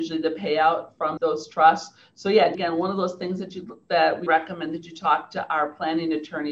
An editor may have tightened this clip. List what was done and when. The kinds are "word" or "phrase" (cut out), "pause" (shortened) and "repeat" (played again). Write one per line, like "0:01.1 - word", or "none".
0:01.2 - word
0:02.5 - word
0:04.3 - word